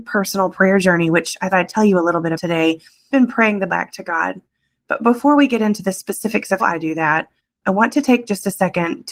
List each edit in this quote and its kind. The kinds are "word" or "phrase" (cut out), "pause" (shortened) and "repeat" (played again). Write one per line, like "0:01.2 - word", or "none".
0:01.5 - word
0:02.3 - word
0:03.1 - word
0:03.7 - word
0:06.6 - word